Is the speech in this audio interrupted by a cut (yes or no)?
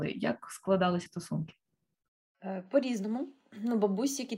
yes